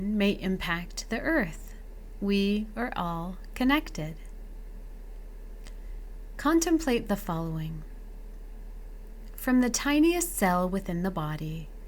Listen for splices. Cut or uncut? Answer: uncut